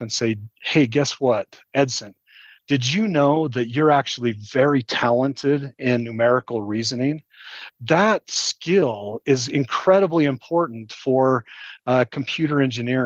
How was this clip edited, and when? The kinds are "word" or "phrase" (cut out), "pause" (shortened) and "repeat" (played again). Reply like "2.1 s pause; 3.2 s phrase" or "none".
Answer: none